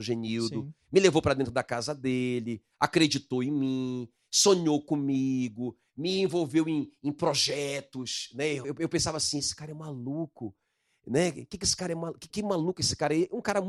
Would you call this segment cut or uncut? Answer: cut